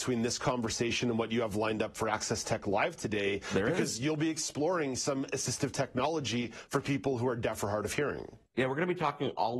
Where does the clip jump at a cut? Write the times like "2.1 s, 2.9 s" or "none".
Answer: 8.5 s